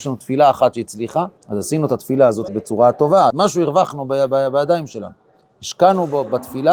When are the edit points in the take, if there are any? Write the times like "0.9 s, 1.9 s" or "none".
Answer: 1.4 s, 2.5 s, 3.3 s